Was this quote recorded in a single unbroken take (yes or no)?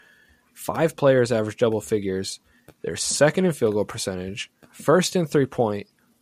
yes